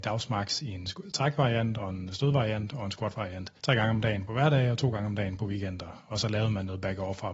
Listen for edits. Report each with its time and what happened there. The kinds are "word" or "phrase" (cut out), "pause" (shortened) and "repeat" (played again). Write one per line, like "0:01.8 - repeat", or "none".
0:01.0 - word
0:03.6 - pause

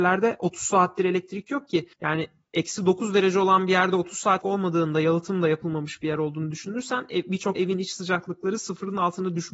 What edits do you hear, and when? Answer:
0:01.9 - pause
0:04.4 - word
0:07.6 - word

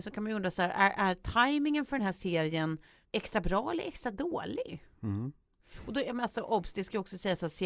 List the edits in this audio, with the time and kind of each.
none

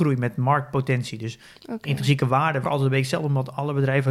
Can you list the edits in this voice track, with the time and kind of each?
0:02.6 - phrase

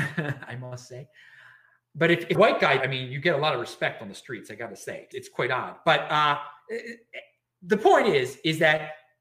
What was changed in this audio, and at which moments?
0:01.8 - word
0:02.3 - word
0:02.8 - word
0:05.1 - word

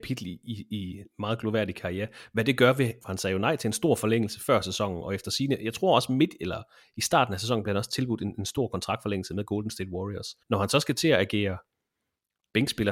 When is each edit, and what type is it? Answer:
0:03.0 - phrase
0:10.4 - pause

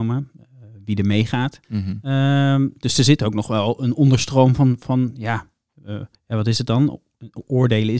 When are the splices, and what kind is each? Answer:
0:01.6 - pause
0:06.1 - pause

